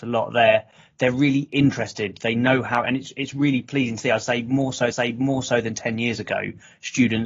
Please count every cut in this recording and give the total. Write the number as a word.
one